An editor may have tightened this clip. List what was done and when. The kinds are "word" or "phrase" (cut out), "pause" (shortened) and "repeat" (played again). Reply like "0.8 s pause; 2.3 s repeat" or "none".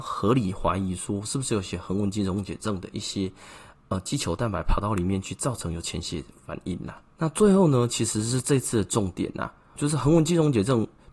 7.1 s pause; 9.8 s word